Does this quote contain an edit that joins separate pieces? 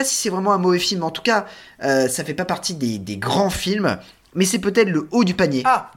no; 0 cuts

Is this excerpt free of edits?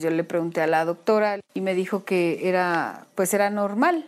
no; 1 cut; at 3.1 s

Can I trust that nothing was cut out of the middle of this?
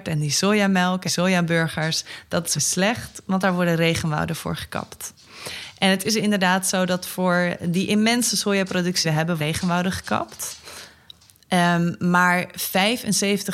no; 4 cuts; at 1.1 s, 2.5 s, 9.0 s, 9.4 s

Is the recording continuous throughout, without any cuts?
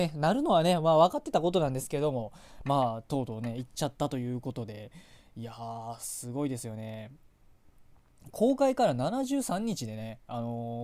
yes; 0 cuts

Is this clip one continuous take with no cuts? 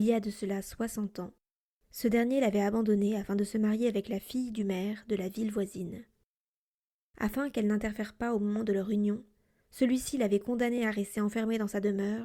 yes; 0 cuts

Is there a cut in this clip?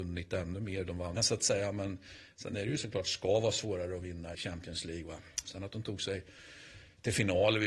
yes; 3 cuts; at 1.2 s, 2.8 s, 4.3 s

